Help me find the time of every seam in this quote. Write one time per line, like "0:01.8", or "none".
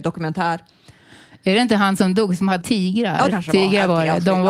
0:02.0
0:02.6
0:03.3